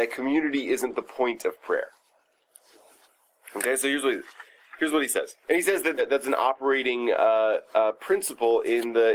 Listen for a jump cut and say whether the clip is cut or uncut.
cut